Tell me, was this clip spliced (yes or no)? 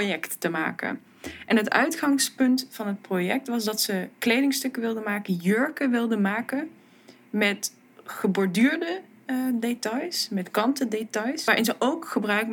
no